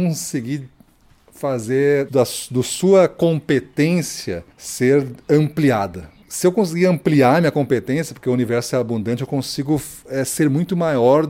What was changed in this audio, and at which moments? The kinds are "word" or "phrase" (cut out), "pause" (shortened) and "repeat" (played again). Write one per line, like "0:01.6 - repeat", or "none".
0:02.1 - word
0:04.5 - pause
0:06.2 - pause